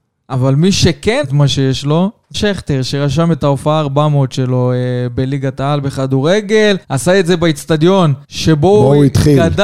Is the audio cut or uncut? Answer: cut